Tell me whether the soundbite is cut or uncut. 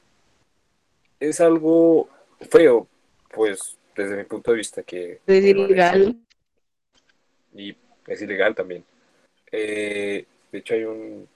cut